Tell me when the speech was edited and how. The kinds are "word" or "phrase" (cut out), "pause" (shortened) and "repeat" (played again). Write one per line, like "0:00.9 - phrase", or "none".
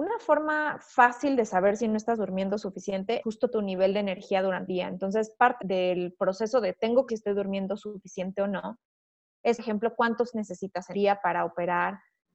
0:03.2 - word
0:04.7 - word
0:05.6 - word
0:07.1 - word
0:09.6 - word
0:10.3 - word
0:10.9 - word